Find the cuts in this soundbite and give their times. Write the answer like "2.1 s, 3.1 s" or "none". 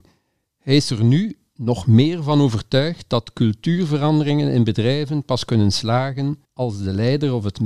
6.4 s